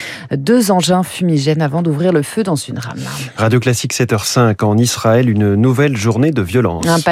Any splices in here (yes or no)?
no